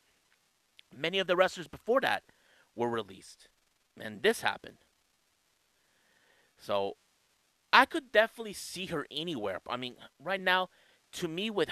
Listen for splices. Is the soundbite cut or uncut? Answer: uncut